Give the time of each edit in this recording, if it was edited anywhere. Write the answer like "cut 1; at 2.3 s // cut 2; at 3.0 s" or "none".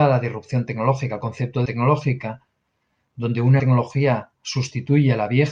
cut 1; at 1.7 s // cut 2; at 3.6 s